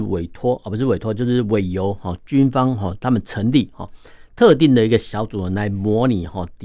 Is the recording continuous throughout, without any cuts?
yes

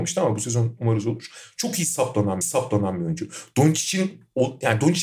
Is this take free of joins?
no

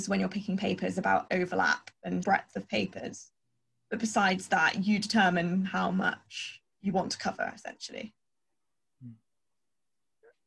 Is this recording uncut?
no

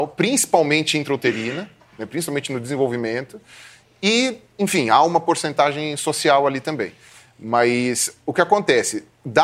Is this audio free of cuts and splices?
yes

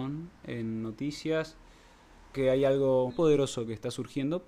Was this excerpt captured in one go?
no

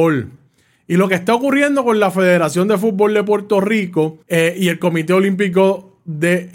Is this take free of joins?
no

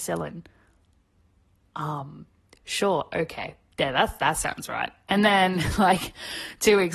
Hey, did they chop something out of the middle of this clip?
no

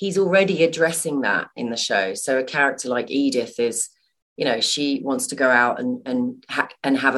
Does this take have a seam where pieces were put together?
no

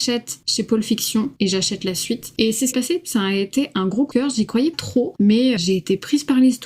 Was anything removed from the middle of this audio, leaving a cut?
yes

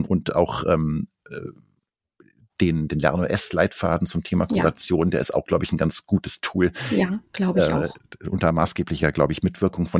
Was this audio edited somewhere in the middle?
no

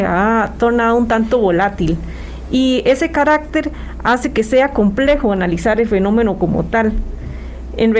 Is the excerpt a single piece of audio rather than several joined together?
yes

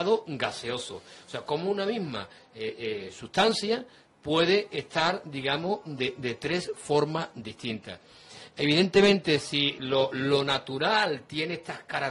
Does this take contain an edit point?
no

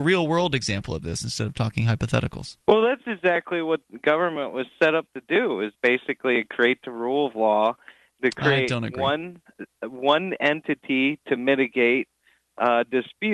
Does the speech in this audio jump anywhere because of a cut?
yes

